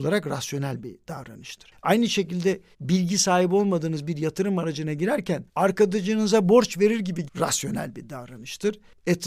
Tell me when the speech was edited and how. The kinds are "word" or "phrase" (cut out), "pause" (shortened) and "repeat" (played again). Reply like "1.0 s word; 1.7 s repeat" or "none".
2.7 s word; 5.5 s pause; 7.3 s phrase